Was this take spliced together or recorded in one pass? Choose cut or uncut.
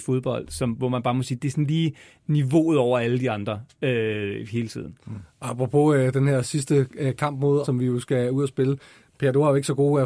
cut